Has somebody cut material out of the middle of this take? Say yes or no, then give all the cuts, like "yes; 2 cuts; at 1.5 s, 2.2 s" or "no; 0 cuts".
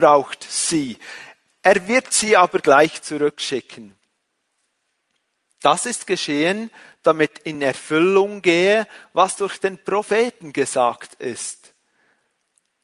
no; 0 cuts